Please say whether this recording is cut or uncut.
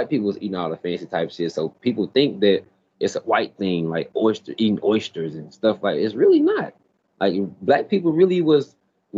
uncut